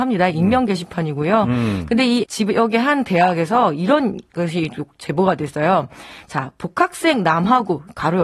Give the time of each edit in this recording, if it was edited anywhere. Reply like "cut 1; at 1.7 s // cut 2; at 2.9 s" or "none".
cut 1; at 2.2 s